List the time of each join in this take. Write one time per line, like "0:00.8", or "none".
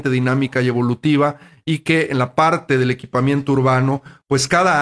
none